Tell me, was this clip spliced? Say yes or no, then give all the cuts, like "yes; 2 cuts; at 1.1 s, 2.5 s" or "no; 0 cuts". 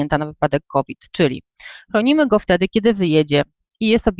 no; 0 cuts